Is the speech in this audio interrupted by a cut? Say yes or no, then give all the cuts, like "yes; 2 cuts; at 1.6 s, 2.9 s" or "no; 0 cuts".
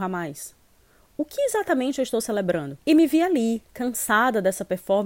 yes; 1 cut; at 2.8 s